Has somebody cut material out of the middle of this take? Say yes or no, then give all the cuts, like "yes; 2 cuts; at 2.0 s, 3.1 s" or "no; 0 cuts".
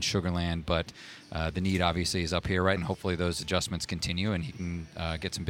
yes; 1 cut; at 2.8 s